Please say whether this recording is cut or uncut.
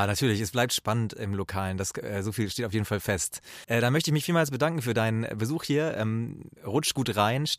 cut